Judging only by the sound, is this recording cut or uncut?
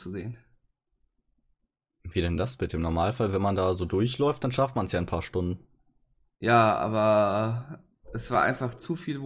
uncut